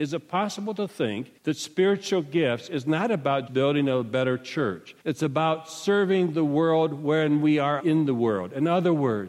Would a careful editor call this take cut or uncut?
cut